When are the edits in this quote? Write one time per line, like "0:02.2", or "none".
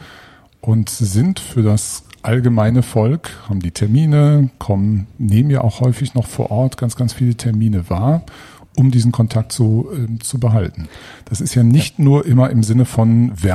none

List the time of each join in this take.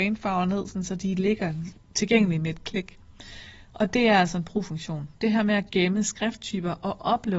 0:01.7

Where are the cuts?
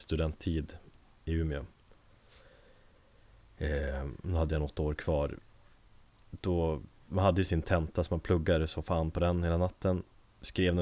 none

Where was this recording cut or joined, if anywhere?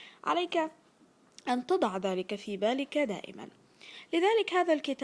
none

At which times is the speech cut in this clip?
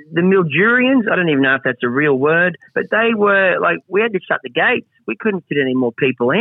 0:02.7

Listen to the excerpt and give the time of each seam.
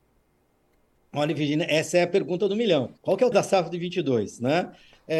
0:03.0
0:03.3

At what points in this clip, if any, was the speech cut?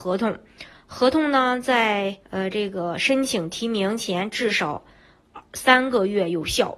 0:02.2

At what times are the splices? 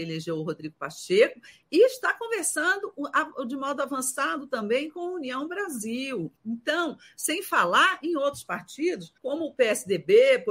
0:06.4
0:09.2

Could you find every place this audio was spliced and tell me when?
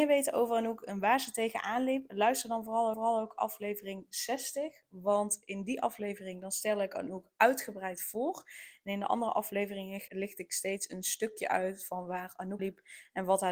0:02.9
0:10.1
0:12.6

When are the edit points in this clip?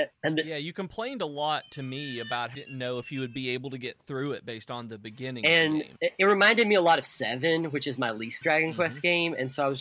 0:02.5
0:06.0
0:08.4

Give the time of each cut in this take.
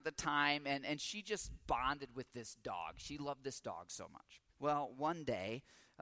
0:04.5

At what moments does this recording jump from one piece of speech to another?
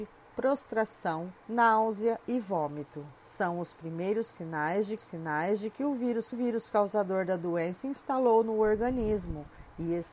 0:01.4
0:03.2
0:05.0
0:06.3
0:07.8

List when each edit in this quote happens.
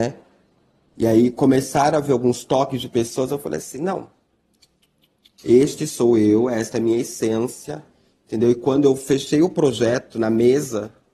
none

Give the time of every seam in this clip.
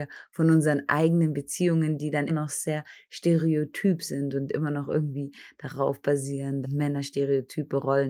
0:02.3
0:06.6

